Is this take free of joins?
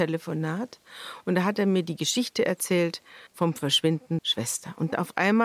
no; 2 cuts; at 3.3 s, 4.2 s

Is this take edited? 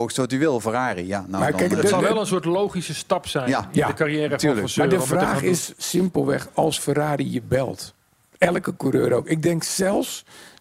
no; 0 cuts

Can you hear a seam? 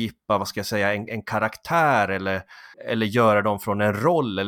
yes; 1 cut; at 2.7 s

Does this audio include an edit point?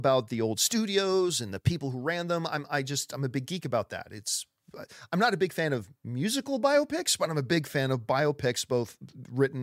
yes; 1 cut; at 6.0 s

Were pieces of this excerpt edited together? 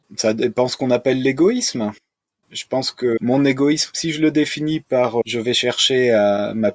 no; 0 cuts

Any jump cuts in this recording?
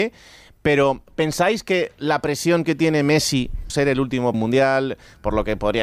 yes; 3 cuts; at 1.1 s, 3.7 s, 4.3 s

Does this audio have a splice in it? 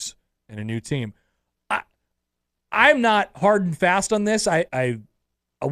yes; 1 cut; at 4.7 s

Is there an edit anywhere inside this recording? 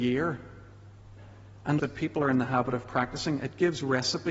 yes; 1 cut; at 1.8 s

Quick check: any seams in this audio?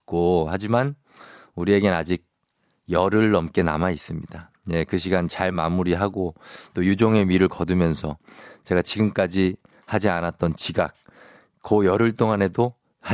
no; 0 cuts

